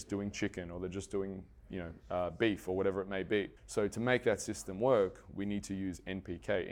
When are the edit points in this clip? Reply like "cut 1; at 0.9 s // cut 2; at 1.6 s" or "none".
cut 1; at 3.6 s